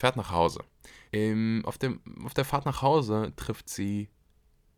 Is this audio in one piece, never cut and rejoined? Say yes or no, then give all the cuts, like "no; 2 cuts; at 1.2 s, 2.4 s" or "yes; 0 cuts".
no; 1 cut; at 1.1 s